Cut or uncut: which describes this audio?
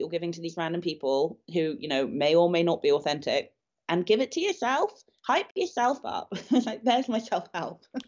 uncut